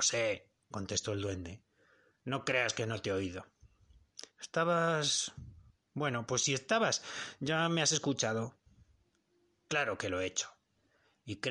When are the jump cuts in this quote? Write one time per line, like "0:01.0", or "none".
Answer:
none

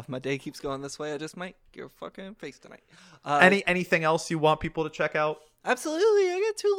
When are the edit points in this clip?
0:01.7

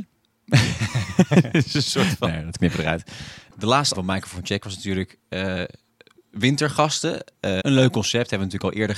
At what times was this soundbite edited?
0:03.9
0:07.6

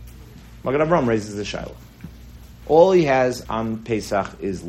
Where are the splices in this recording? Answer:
0:03.5

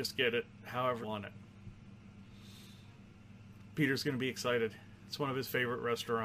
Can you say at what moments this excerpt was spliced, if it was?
0:01.0

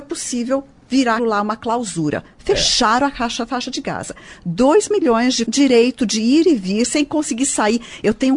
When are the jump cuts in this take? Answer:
0:01.2
0:05.4

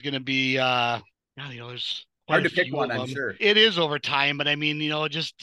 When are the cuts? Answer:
0:01.1
0:02.1
0:03.4

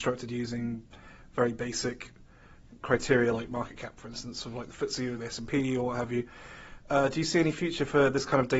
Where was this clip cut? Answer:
none

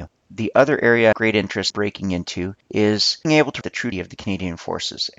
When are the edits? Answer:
0:01.1
0:01.7
0:03.2
0:03.6
0:03.9

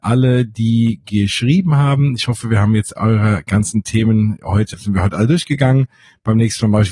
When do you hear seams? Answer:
0:04.7

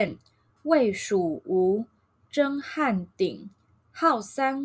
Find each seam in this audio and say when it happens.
none

